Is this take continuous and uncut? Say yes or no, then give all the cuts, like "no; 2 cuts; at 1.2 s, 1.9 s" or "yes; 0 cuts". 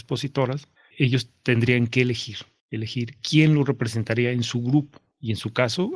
yes; 0 cuts